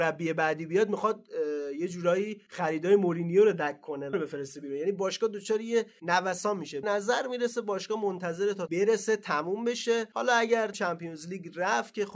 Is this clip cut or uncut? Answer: cut